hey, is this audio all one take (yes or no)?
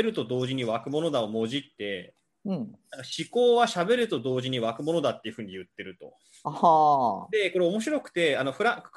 yes